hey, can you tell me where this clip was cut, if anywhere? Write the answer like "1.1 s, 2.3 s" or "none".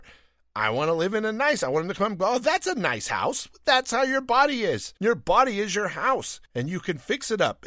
5.0 s, 6.5 s

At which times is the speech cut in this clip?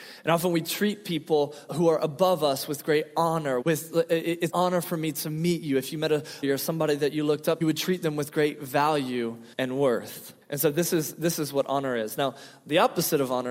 1.7 s, 3.6 s, 4.5 s, 6.4 s, 7.6 s, 9.5 s, 10.4 s

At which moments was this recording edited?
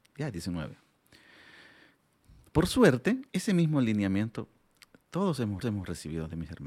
3.3 s, 5.6 s

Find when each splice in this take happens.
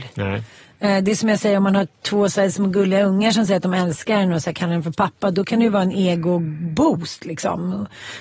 none

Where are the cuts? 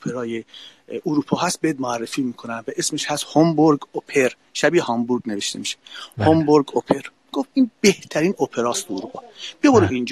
none

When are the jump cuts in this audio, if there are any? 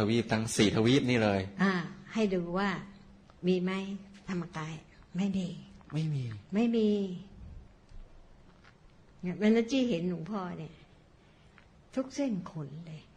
5.8 s

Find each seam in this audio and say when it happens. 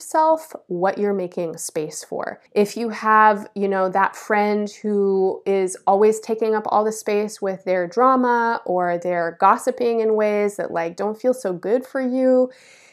2.5 s

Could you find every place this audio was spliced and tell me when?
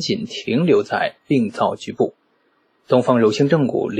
2.3 s

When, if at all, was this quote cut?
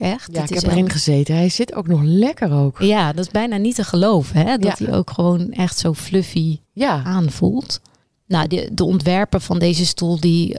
6.6 s, 8.0 s

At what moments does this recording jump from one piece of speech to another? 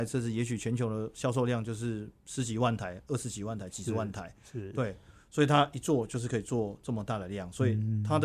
none

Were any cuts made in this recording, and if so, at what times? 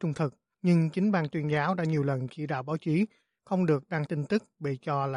4.1 s

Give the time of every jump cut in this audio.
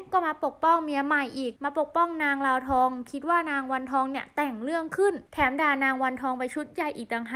1.6 s, 5.3 s

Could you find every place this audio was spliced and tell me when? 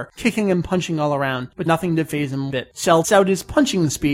1.7 s, 2.5 s, 3.0 s

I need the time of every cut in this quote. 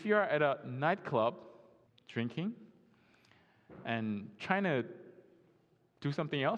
1.9 s

